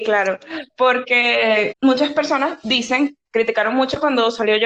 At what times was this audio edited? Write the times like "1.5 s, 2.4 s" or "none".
1.7 s, 3.3 s